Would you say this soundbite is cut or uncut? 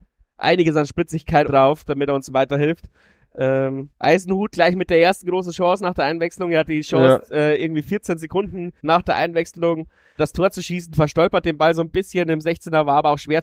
cut